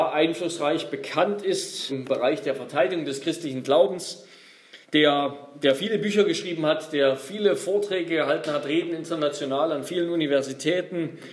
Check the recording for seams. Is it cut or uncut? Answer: cut